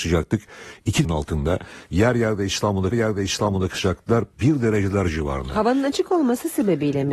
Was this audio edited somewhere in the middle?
yes; 2 cuts; at 1.0 s, 2.9 s

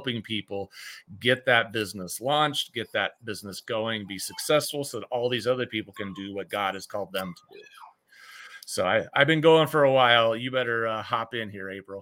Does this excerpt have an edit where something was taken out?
no; 0 cuts

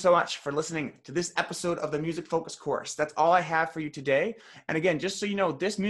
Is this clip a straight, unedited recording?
yes; 0 cuts

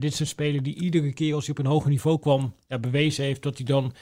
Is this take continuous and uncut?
yes; 0 cuts

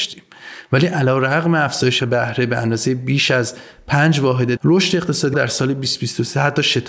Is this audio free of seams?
no; 3 cuts; at 2.0 s, 4.6 s, 5.3 s

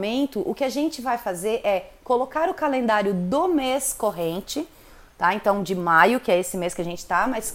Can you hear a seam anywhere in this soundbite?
no; 0 cuts

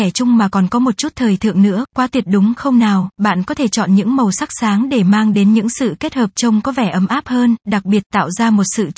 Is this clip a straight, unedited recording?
yes; 0 cuts

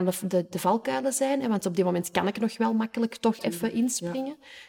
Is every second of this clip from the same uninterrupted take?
yes; 0 cuts

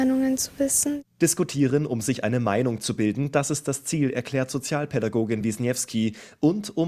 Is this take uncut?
yes; 0 cuts

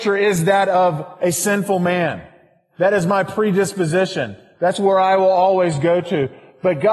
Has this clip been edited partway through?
no; 0 cuts

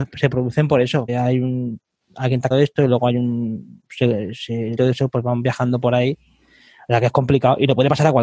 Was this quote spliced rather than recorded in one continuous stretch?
yes; 4 cuts; at 1.1 s, 2.5 s, 3.9 s, 4.8 s

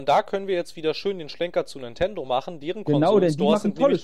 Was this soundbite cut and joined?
no; 0 cuts

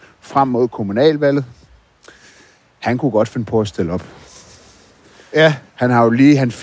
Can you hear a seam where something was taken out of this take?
no; 0 cuts

